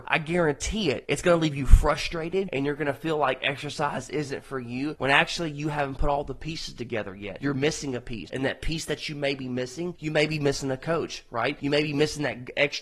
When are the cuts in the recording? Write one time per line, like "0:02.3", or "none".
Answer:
none